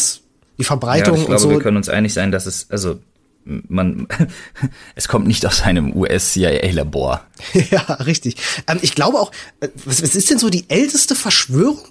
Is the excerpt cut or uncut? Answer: cut